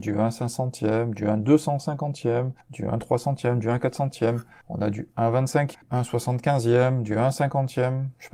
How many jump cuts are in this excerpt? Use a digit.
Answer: 2